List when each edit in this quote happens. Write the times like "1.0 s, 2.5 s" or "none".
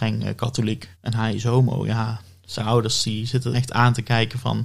0.9 s, 2.6 s, 3.5 s